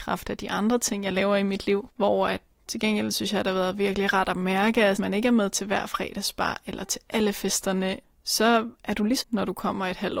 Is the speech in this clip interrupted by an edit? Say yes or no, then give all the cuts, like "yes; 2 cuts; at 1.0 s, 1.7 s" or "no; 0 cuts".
yes; 3 cuts; at 2.5 s, 5.0 s, 9.2 s